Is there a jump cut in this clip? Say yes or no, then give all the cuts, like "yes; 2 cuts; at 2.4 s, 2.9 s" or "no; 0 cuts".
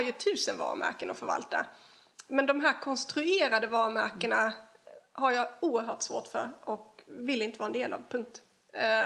no; 0 cuts